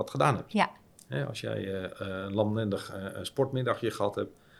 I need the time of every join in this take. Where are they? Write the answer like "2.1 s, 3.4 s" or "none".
none